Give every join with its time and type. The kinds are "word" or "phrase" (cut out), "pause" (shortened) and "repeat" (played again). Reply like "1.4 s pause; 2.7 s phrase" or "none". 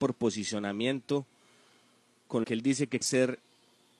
2.4 s word; 3.0 s word